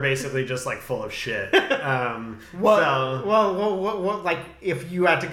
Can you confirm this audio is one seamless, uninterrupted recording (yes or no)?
yes